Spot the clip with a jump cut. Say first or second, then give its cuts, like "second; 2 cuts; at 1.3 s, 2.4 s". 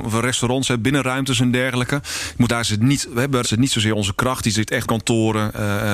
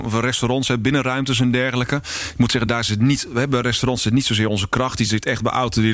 first; 3 cuts; at 2.5 s, 3.4 s, 4.8 s